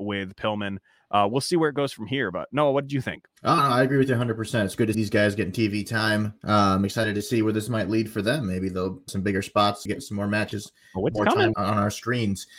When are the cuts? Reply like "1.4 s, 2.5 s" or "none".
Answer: 3.4 s, 4.9 s, 9.1 s, 9.9 s, 11.5 s